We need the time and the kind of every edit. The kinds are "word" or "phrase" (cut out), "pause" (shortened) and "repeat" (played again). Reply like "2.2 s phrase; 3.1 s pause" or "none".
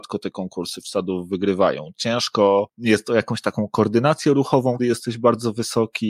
4.8 s word

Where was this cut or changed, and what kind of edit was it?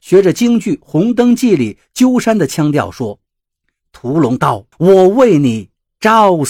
3.3 s pause; 4.7 s pause

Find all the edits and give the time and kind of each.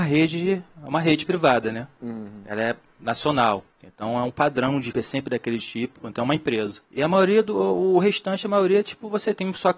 3.7 s pause; 4.9 s word; 6.9 s pause

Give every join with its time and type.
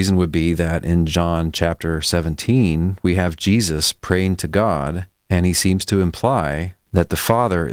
5.1 s pause

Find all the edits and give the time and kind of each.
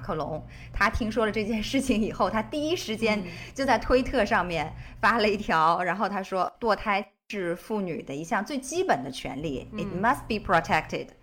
none

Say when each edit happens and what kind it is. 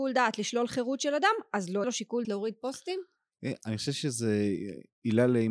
1.8 s word; 2.2 s word

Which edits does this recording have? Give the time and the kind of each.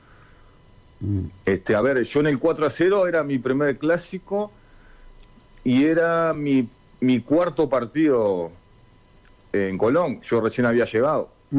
none

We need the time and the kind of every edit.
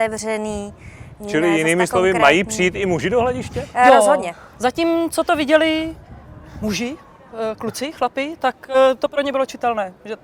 none

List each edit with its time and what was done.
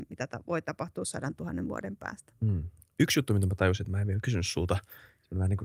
none

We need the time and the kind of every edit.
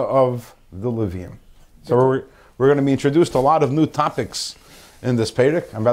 none

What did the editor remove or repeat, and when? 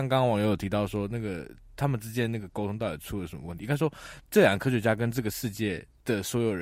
4.2 s pause

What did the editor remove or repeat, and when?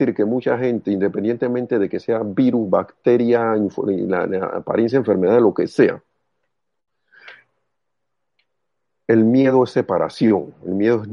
none

